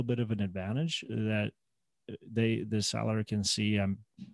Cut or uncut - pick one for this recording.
uncut